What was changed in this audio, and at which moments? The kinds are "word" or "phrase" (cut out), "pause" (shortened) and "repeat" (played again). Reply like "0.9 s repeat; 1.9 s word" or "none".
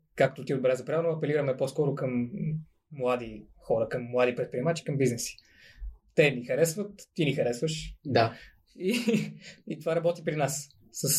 none